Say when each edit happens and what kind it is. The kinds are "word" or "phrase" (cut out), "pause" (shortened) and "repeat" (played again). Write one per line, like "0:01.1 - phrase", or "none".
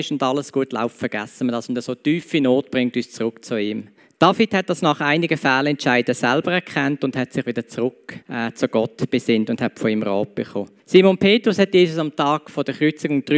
0:04.0 - pause
0:08.2 - pause
0:10.8 - pause